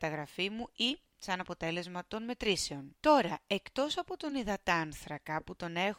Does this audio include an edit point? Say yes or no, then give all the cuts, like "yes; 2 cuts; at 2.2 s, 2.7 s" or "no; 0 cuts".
no; 0 cuts